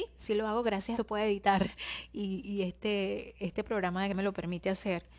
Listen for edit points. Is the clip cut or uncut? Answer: cut